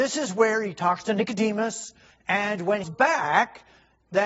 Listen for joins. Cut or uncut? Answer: cut